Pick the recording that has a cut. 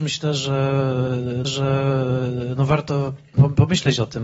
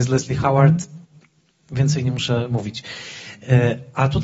first; 1 cut; at 1.4 s

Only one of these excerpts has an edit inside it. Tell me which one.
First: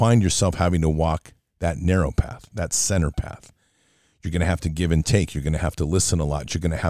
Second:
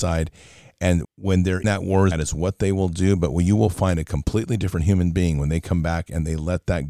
second; 3 cuts; at 1.0 s, 1.6 s, 2.1 s

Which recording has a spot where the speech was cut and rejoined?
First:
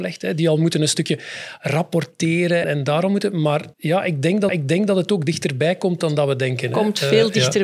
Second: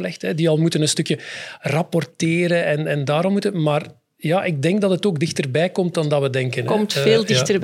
first; 3 cuts; at 2.6 s, 3.7 s, 4.5 s

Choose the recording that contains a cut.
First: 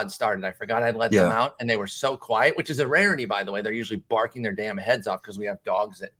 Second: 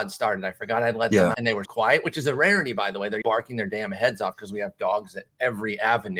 second; 3 cuts; at 1.3 s, 1.7 s, 3.2 s

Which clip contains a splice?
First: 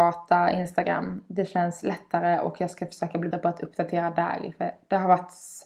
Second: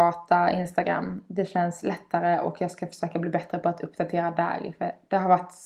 first; 1 cut; at 3.3 s

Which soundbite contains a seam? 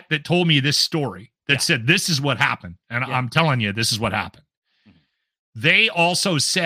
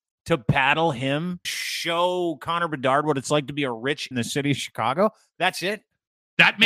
second; 2 cuts; at 1.4 s, 4.1 s

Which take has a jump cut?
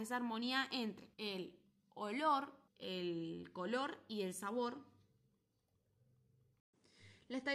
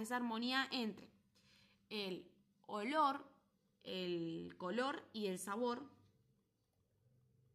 first; 2 cuts; at 1.1 s, 2.7 s

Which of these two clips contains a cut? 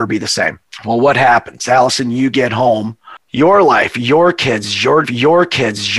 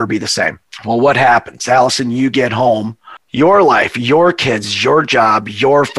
first; 1 cut; at 5.0 s

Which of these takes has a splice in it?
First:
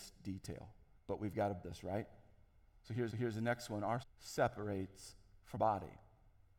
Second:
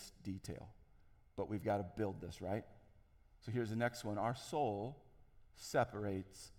first; 5 cuts; at 1.0 s, 1.6 s, 3.1 s, 4.0 s, 5.6 s

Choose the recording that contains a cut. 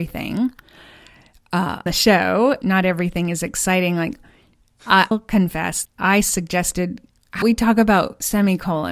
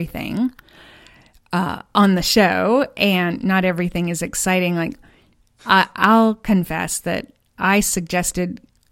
first; 5 cuts; at 1.9 s, 2.6 s, 5.1 s, 5.9 s, 7.4 s

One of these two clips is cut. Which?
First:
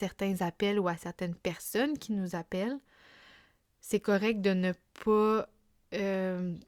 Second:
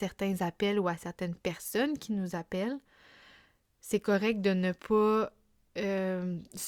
second; 1 cut; at 4.8 s

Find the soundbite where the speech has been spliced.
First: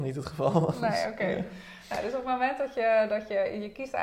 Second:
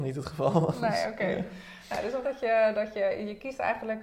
second; 1 cut; at 2.2 s

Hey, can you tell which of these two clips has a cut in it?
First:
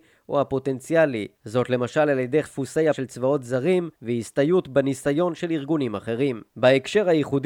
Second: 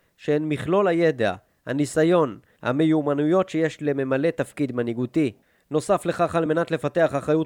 first; 5 cuts; at 1.3 s, 2.4 s, 2.9 s, 3.9 s, 6.5 s

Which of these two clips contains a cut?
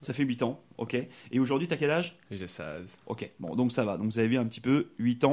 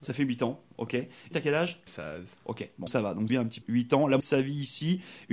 second; 6 cuts; at 1.3 s, 1.9 s, 2.9 s, 3.3 s, 3.6 s, 4.2 s

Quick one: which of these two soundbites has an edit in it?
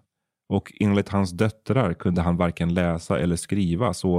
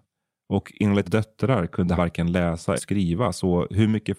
second; 3 cuts; at 1.0 s, 2.0 s, 2.8 s

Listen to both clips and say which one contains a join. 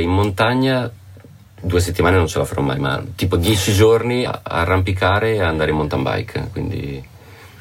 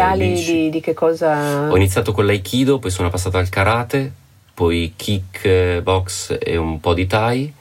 first; 1 cut; at 4.3 s

